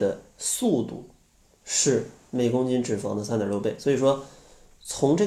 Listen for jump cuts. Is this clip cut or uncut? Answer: uncut